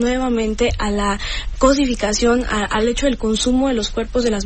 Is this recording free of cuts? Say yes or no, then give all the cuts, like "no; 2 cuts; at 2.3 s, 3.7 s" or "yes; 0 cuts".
no; 1 cut; at 1.6 s